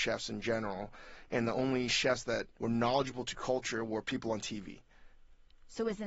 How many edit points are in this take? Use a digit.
1